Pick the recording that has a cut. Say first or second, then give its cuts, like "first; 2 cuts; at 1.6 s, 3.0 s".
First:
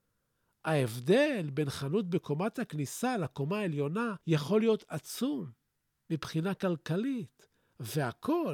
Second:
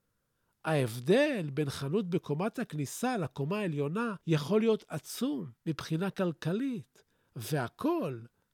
second; 1 cut; at 5.6 s